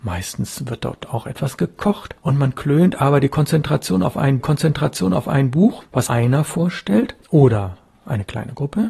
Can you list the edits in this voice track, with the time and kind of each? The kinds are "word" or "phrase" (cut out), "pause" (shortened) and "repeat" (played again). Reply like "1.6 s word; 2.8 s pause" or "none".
4.4 s repeat; 6.1 s word; 7.2 s pause